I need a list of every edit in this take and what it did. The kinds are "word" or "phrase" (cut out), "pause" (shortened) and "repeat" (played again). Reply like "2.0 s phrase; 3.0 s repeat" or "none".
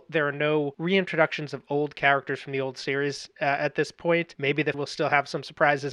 4.7 s word